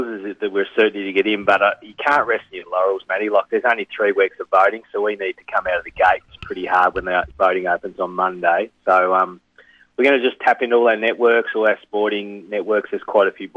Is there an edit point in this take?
no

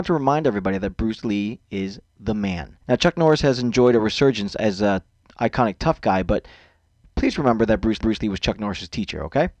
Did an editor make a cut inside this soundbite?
yes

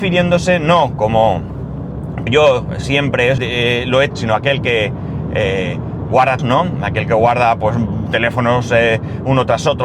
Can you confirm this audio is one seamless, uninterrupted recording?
no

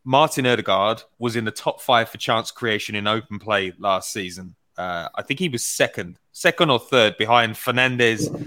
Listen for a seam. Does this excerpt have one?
yes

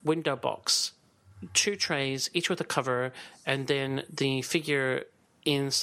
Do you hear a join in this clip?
no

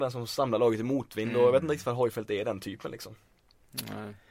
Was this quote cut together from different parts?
no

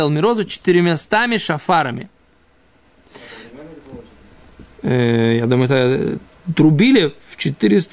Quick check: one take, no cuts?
yes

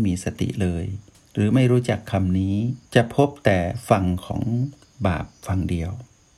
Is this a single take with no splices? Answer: no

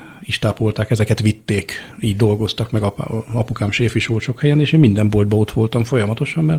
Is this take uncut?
yes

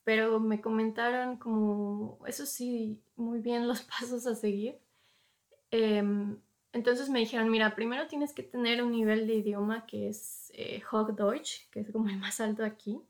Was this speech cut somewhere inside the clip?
no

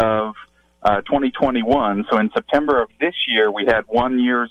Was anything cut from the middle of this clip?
no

